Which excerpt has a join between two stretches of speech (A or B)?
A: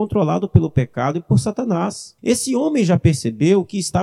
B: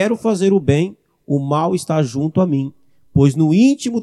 A